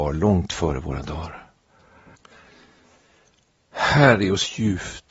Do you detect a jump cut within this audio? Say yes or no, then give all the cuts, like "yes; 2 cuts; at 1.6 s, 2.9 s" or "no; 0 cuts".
no; 0 cuts